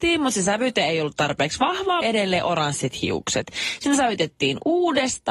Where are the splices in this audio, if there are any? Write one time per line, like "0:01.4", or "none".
0:02.0